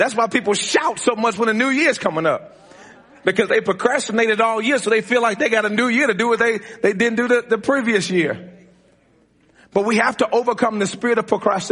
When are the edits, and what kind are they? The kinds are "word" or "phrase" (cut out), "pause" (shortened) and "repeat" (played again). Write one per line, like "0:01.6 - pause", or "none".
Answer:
none